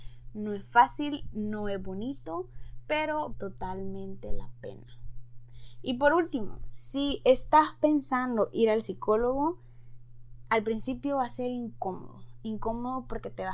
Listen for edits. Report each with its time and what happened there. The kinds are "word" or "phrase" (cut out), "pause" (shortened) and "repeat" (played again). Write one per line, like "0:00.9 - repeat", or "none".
0:03.3 - word